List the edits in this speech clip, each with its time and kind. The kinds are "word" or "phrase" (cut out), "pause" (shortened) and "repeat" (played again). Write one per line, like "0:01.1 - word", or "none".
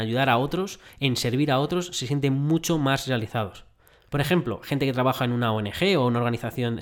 none